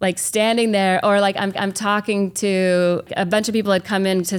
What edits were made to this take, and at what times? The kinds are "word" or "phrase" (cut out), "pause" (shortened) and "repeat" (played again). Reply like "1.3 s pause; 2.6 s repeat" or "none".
1.5 s repeat